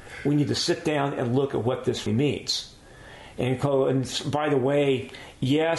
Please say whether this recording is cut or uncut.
cut